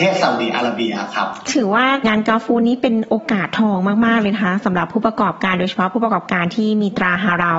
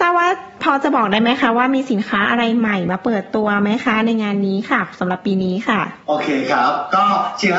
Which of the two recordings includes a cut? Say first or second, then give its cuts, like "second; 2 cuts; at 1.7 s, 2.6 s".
first; 1 cut; at 1.5 s